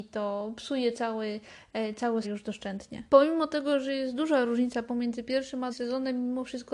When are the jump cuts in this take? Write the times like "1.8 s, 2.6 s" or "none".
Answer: 2.2 s, 3.1 s, 5.7 s